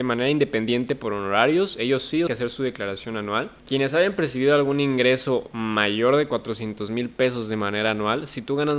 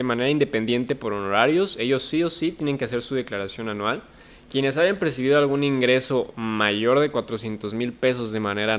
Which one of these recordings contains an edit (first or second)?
first